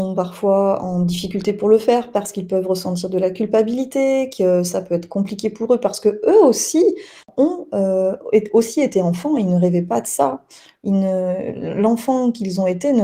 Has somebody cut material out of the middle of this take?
no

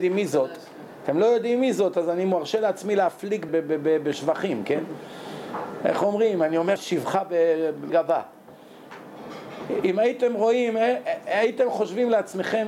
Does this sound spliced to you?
yes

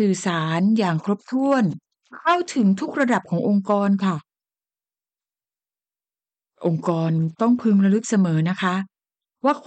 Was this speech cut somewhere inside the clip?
no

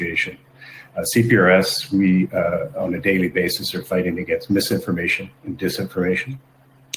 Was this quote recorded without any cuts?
yes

